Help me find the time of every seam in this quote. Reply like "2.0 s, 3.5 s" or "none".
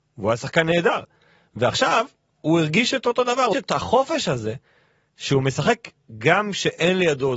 3.5 s